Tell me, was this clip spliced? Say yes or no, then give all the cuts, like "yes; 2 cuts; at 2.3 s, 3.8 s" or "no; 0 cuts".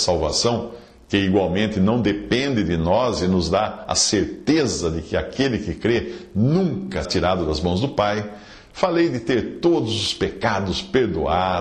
yes; 1 cut; at 7.0 s